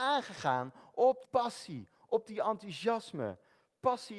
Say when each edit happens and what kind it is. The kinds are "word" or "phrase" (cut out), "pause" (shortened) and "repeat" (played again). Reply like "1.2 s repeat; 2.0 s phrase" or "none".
1.2 s word